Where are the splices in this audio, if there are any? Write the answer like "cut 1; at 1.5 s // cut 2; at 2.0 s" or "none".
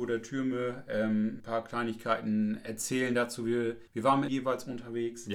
cut 1; at 1.4 s // cut 2; at 3.9 s // cut 3; at 4.3 s